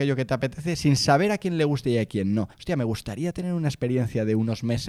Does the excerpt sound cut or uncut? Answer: cut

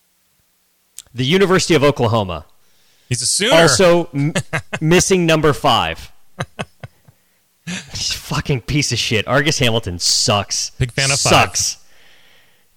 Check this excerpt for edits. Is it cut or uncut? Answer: uncut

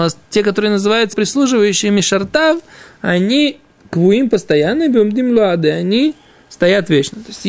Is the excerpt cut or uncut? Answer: cut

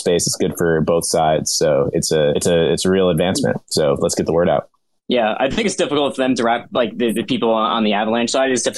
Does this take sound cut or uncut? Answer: uncut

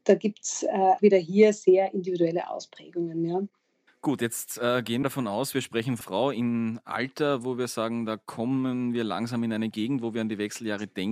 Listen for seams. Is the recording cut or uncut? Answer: cut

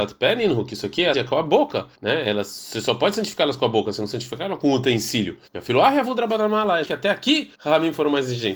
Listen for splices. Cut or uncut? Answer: cut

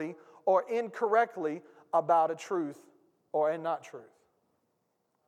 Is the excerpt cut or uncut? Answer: uncut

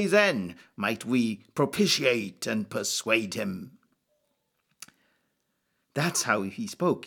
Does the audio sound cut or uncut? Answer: uncut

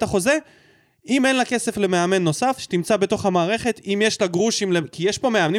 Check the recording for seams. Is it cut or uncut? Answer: uncut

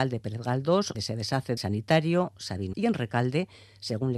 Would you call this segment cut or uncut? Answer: cut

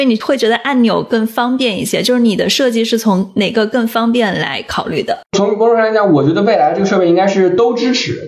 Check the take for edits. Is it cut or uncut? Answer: cut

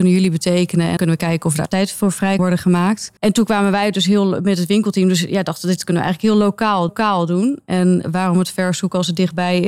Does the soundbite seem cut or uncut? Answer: cut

